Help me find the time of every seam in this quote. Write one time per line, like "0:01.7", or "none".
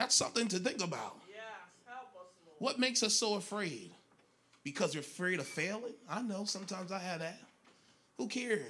none